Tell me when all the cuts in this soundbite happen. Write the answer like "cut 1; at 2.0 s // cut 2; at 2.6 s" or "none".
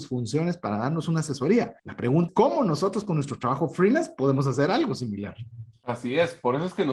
cut 1; at 1.8 s // cut 2; at 2.3 s